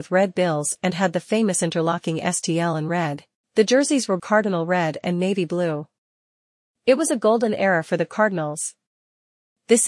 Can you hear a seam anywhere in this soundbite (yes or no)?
yes